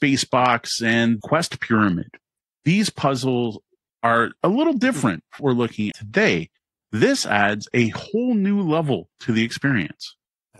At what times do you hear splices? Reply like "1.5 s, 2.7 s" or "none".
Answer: 1.2 s, 5.4 s, 5.9 s

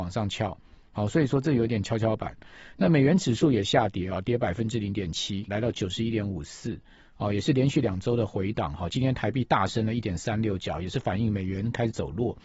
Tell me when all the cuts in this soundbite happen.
5.5 s

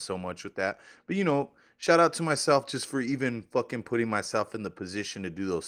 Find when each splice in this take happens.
none

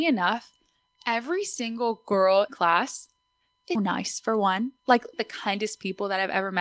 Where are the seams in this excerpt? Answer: 2.5 s, 3.8 s, 5.1 s

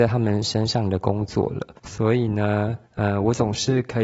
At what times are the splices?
1.7 s, 2.8 s

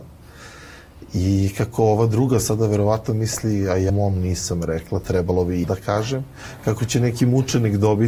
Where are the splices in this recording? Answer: 3.9 s, 5.6 s

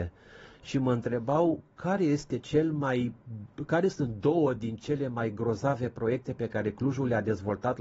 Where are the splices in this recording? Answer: none

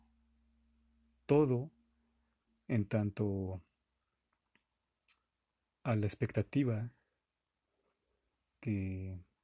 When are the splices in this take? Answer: none

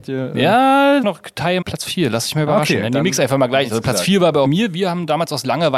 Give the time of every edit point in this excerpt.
1.0 s, 1.6 s, 4.4 s

